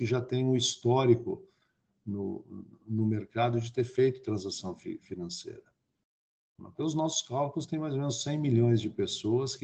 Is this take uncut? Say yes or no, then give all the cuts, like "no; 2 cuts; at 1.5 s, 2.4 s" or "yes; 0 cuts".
yes; 0 cuts